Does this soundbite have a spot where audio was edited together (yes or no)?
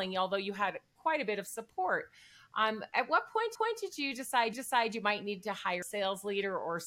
yes